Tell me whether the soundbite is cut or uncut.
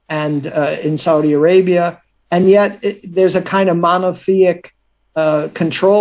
uncut